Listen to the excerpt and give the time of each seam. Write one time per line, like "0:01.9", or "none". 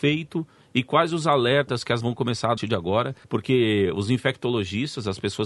0:02.0
0:02.6
0:03.2